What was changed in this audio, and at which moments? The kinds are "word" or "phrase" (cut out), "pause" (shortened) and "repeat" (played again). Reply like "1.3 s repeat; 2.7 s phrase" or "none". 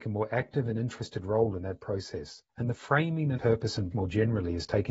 2.5 s pause; 3.4 s phrase; 3.9 s word